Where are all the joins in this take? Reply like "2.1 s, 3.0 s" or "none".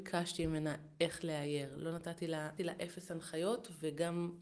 2.6 s